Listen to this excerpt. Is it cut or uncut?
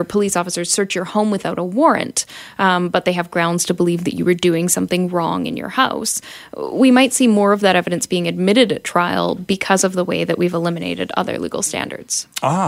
uncut